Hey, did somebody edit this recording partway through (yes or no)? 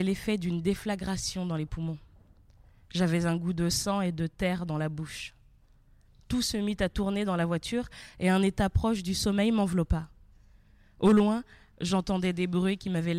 no